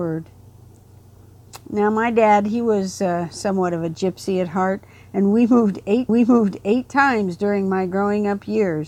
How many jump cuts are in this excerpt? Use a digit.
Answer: 1